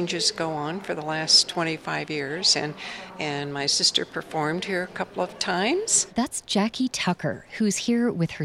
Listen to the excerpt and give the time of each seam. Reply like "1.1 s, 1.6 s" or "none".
none